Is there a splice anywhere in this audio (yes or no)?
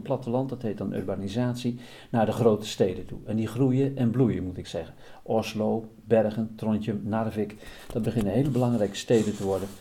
yes